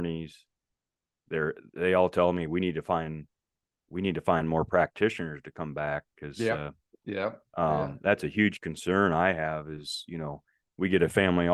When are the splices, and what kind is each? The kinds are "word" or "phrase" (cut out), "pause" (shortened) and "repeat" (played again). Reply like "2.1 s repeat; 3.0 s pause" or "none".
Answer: none